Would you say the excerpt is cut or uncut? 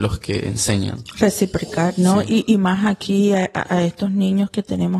uncut